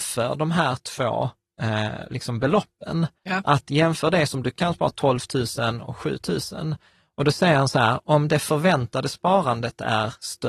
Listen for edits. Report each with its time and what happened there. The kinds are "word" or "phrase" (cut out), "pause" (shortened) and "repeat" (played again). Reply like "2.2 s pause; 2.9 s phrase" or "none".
3.2 s pause